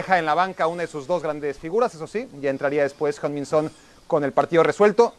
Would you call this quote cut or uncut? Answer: uncut